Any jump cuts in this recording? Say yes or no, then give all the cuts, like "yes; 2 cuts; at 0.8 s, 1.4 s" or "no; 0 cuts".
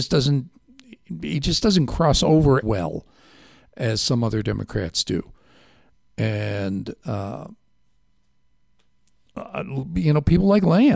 yes; 1 cut; at 2.6 s